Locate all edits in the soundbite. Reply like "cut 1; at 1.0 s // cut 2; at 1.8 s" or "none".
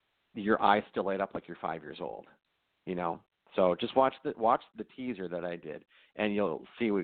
cut 1; at 4.7 s